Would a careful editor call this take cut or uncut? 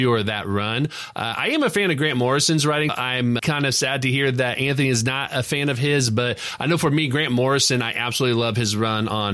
cut